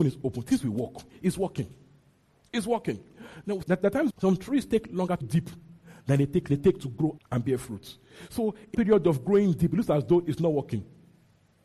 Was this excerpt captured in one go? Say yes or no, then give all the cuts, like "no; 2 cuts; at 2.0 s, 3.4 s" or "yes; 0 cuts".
no; 6 cuts; at 3.6 s, 4.1 s, 5.2 s, 6.5 s, 7.2 s, 8.7 s